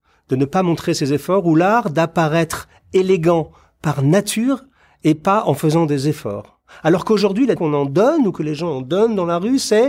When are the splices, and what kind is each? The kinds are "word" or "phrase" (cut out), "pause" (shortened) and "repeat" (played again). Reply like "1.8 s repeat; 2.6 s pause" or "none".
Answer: 7.6 s word